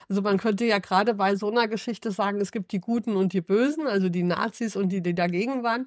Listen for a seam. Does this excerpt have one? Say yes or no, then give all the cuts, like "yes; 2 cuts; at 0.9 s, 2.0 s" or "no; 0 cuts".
no; 0 cuts